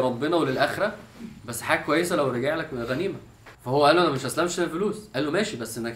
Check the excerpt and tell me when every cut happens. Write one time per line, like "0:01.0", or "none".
0:01.4
0:03.5